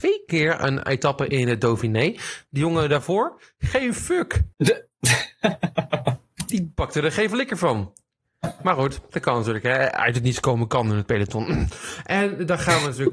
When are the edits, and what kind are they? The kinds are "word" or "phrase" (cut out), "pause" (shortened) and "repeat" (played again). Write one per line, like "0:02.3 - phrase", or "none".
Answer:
0:04.5 - pause